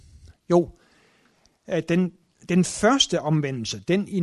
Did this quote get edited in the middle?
no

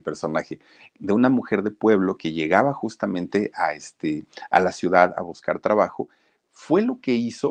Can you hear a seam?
no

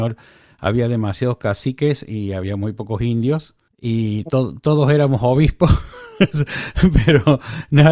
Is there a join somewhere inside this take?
yes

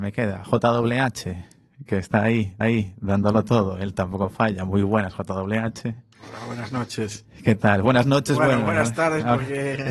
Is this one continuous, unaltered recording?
no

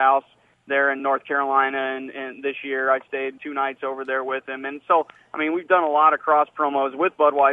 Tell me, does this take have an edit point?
yes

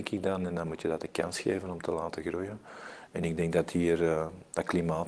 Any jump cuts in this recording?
no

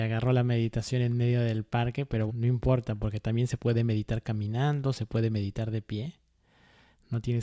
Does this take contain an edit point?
yes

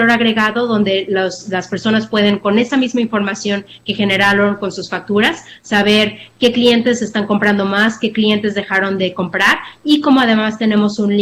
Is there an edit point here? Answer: no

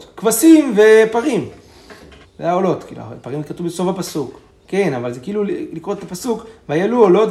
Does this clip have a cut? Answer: yes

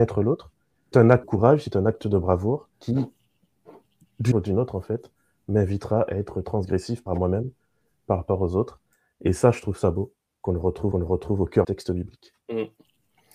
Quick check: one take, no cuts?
no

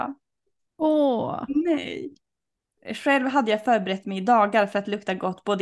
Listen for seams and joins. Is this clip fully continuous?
yes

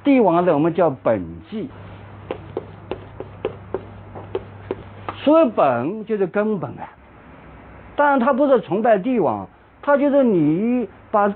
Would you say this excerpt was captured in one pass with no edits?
yes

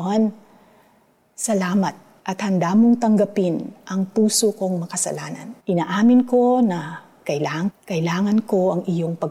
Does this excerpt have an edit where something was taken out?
yes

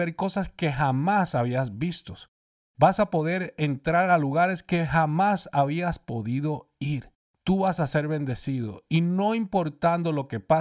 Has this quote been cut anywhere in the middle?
yes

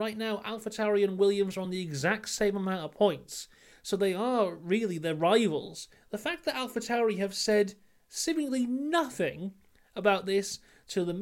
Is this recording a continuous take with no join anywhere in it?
yes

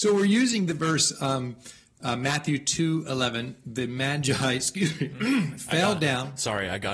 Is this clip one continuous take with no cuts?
yes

